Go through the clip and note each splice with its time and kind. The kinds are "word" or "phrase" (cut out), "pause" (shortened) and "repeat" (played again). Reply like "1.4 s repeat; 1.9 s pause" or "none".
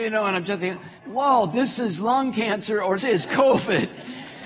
1.0 s pause; 3.0 s word